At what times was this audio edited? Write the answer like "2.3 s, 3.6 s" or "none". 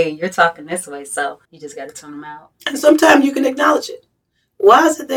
1.4 s